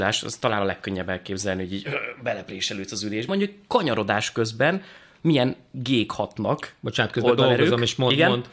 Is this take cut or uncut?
cut